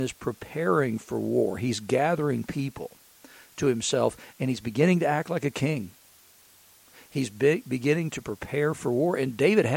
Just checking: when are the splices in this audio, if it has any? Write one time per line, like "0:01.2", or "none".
none